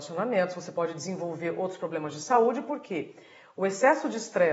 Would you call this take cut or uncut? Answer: uncut